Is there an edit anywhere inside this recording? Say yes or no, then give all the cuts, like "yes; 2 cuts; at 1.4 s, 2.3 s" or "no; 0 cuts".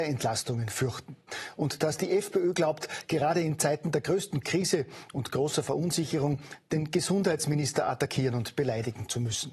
no; 0 cuts